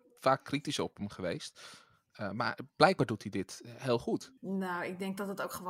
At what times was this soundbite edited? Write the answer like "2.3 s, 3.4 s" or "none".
4.4 s